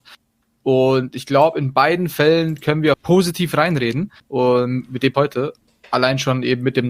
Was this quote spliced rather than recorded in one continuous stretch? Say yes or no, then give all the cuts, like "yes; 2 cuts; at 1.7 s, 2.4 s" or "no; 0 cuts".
yes; 3 cuts; at 2.9 s, 4.2 s, 5.1 s